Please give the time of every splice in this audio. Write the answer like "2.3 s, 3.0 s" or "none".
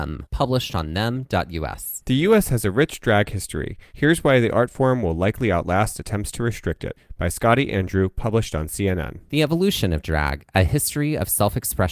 none